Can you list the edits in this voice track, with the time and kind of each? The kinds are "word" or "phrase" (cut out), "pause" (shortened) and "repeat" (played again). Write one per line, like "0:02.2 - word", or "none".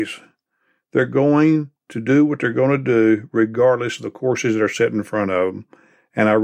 none